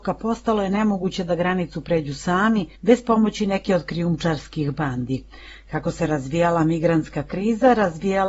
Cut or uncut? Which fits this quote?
cut